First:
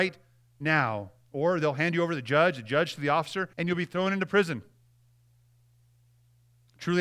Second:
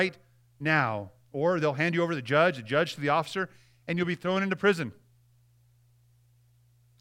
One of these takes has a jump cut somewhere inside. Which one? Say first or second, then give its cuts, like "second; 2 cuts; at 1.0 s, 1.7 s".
first; 1 cut; at 3.5 s